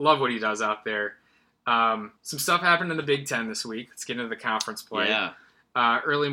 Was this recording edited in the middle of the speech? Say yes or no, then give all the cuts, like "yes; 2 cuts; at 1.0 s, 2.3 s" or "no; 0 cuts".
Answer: yes; 1 cut; at 2.2 s